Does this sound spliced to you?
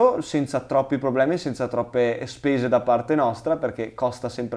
no; 0 cuts

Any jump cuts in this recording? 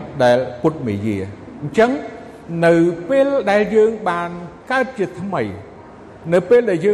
yes; 1 cut; at 4.6 s

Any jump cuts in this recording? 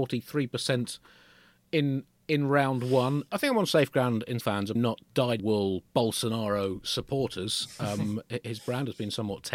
yes; 3 cuts; at 4.4 s, 4.7 s, 5.4 s

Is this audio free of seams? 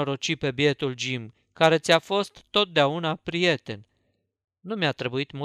yes; 0 cuts

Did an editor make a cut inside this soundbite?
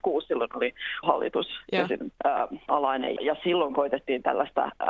yes; 4 cuts; at 1.0 s, 2.2 s, 2.7 s, 3.2 s

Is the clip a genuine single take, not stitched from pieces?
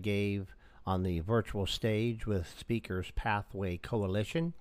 yes; 0 cuts

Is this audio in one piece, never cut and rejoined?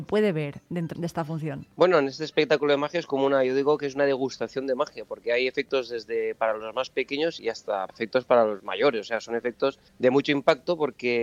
no; 6 cuts; at 1.0 s, 1.7 s, 7.4 s, 7.9 s, 8.6 s, 9.9 s

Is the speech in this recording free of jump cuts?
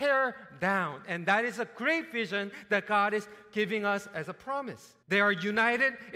no; 1 cut; at 5.0 s

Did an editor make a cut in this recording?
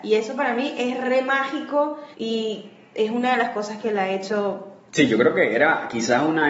yes; 1 cut; at 2.1 s

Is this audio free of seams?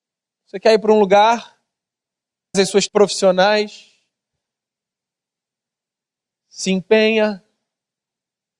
no; 2 cuts; at 2.5 s, 2.9 s

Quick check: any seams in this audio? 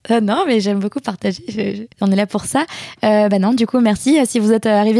yes; 1 cut; at 1.9 s

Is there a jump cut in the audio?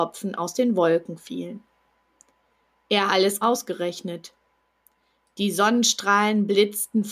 yes; 2 cuts; at 3.1 s, 3.4 s

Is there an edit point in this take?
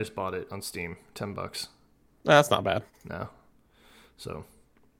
no; 0 cuts

